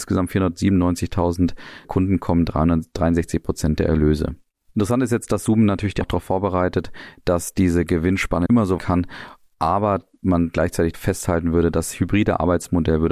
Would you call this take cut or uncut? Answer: cut